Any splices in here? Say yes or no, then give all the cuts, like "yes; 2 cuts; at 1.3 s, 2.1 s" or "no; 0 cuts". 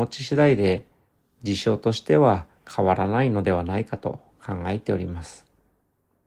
no; 0 cuts